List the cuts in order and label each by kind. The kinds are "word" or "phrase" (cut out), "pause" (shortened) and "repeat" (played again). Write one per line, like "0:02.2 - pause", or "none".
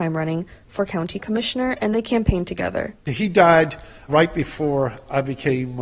0:03.0 - pause
0:04.1 - word